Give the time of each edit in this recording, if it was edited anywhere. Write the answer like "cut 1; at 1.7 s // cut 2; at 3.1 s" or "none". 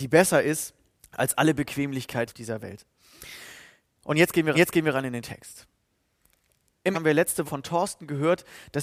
cut 1; at 0.9 s // cut 2; at 2.3 s // cut 3; at 4.5 s // cut 4; at 6.9 s // cut 5; at 7.4 s